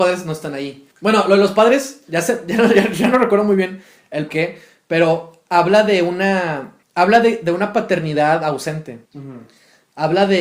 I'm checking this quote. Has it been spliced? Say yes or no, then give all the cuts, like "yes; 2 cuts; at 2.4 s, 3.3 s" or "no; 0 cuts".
yes; 4 cuts; at 0.9 s, 4.3 s, 6.8 s, 9.1 s